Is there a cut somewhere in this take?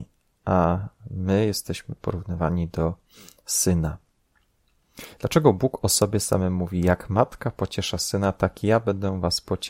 no; 0 cuts

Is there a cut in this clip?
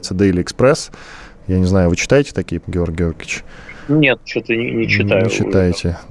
yes; 1 cut; at 2.6 s

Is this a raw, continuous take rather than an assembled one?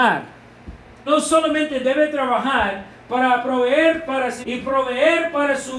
no; 2 cuts; at 1.1 s, 4.4 s

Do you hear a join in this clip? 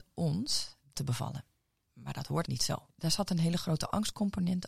yes; 2 cuts; at 0.9 s, 2.4 s

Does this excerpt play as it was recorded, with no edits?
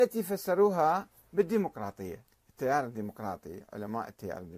no; 1 cut; at 2.3 s

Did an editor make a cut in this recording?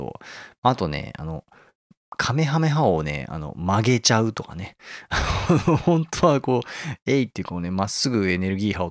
no; 0 cuts

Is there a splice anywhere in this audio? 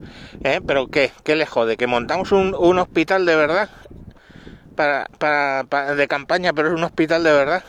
no; 0 cuts

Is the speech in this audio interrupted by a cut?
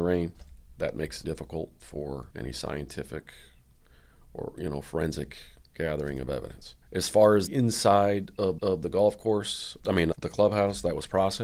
yes; 8 cuts; at 1.2 s, 2.3 s, 5.6 s, 6.8 s, 7.5 s, 8.6 s, 9.8 s, 10.1 s

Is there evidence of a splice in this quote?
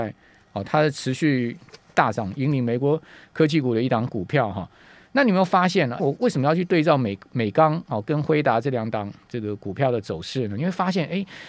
yes; 1 cut; at 6.0 s

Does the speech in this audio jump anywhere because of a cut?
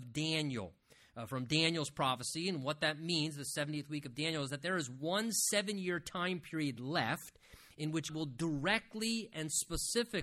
yes; 1 cut; at 8.1 s

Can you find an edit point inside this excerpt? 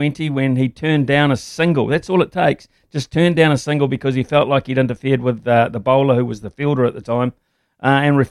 no; 0 cuts

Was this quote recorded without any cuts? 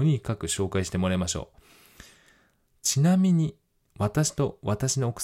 yes; 0 cuts

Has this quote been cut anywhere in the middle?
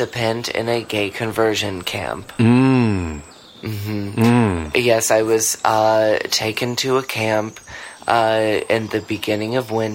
no; 0 cuts

